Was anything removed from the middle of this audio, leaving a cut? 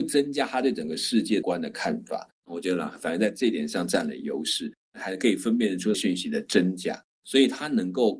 no; 0 cuts

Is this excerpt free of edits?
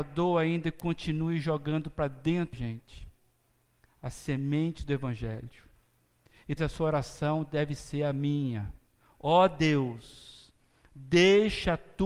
no; 2 cuts; at 2.5 s, 6.6 s

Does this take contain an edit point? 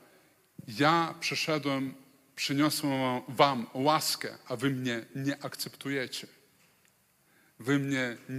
no; 0 cuts

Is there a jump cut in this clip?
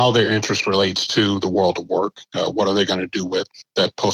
no; 0 cuts

